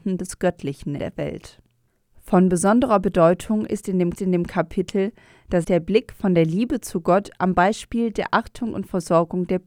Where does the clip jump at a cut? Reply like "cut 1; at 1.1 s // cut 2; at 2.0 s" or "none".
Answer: cut 1; at 1.0 s // cut 2; at 4.1 s // cut 3; at 5.6 s